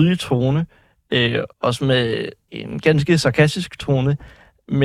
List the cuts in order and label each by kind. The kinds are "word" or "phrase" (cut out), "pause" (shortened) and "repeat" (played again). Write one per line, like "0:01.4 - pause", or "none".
0:01.5 - pause
0:02.5 - word